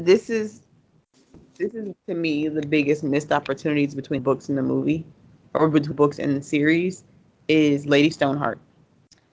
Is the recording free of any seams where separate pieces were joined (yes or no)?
no